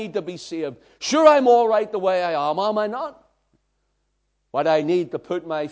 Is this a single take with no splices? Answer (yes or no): yes